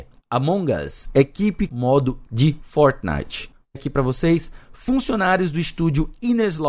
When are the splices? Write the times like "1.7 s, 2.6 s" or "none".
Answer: 1.7 s, 2.3 s, 3.8 s